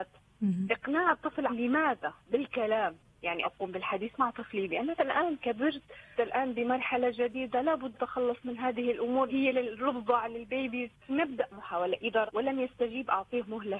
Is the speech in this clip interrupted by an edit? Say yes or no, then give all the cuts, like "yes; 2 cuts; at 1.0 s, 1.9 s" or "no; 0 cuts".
yes; 8 cuts; at 1.5 s, 3.4 s, 5.0 s, 6.1 s, 7.9 s, 9.3 s, 11.1 s, 12.3 s